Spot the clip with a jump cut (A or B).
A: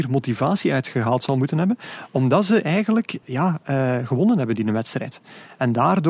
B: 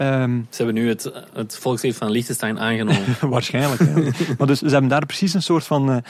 A